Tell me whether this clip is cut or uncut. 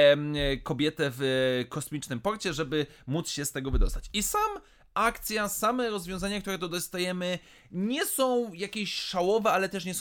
uncut